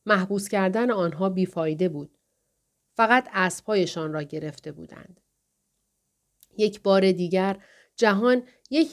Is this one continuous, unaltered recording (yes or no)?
yes